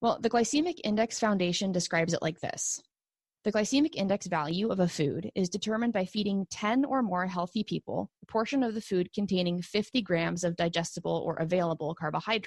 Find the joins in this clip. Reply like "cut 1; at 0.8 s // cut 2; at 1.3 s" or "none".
cut 1; at 8.2 s